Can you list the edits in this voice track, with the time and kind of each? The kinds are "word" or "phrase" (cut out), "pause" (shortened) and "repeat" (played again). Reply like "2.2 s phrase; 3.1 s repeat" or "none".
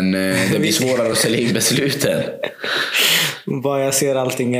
none